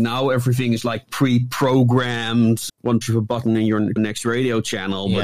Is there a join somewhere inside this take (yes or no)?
yes